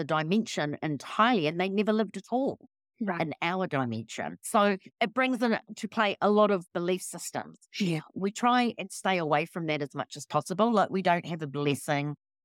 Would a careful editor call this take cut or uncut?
uncut